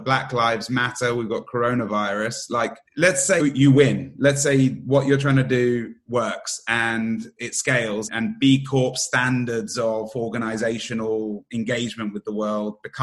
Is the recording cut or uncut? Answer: cut